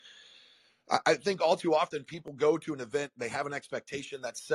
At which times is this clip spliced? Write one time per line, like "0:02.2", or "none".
none